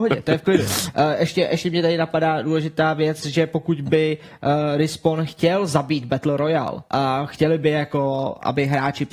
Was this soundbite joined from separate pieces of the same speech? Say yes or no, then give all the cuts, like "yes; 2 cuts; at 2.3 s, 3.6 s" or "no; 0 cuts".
yes; 1 cut; at 6.9 s